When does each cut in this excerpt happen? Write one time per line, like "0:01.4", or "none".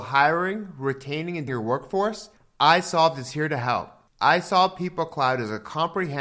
0:01.5